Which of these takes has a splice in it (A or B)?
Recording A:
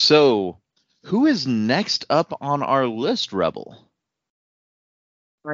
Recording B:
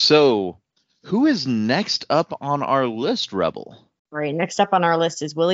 B